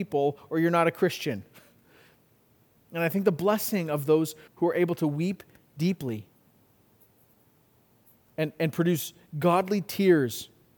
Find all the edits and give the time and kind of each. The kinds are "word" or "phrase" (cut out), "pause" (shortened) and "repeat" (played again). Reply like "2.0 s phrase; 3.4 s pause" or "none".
4.5 s word